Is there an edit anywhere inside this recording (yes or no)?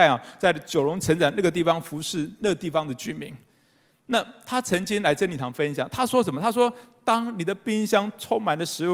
no